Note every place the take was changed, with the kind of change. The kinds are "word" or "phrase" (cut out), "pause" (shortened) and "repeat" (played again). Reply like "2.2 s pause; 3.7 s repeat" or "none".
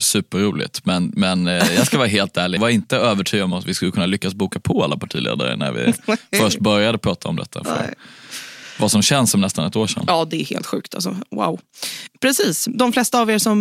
2.6 s word